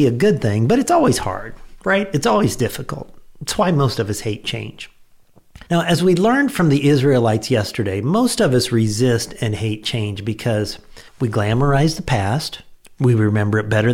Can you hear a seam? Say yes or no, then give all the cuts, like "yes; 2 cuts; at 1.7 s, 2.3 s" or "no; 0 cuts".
yes; 2 cuts; at 5.7 s, 11.1 s